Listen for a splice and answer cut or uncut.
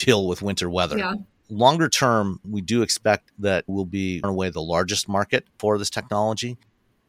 cut